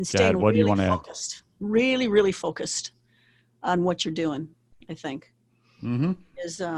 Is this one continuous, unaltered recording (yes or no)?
yes